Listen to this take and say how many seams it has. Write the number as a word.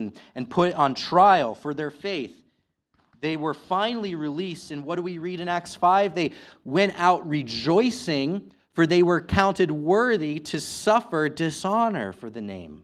zero